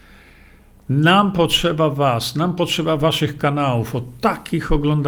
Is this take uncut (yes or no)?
yes